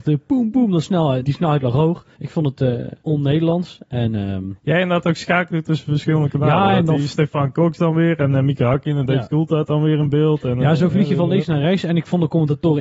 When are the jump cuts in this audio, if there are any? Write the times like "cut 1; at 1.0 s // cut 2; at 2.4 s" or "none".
cut 1; at 1.2 s // cut 2; at 2.1 s // cut 3; at 3.0 s